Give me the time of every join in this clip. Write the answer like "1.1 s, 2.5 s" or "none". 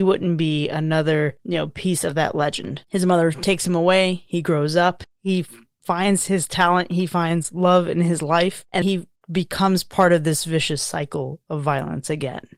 8.8 s